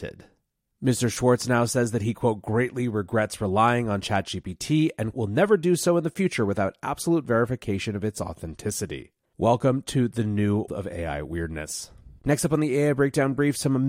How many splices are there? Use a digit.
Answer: 2